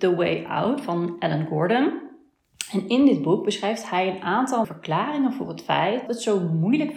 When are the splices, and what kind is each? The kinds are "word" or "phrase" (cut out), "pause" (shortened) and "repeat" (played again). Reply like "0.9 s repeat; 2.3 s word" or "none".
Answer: 4.6 s word; 6.1 s word